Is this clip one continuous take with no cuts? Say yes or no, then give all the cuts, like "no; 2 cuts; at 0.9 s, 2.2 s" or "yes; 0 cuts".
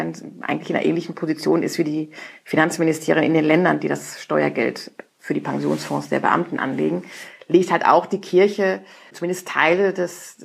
yes; 0 cuts